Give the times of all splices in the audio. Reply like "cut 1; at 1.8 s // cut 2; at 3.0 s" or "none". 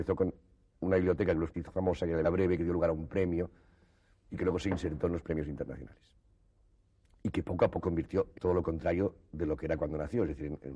cut 1; at 1.5 s // cut 2; at 2.2 s // cut 3; at 7.8 s // cut 4; at 8.3 s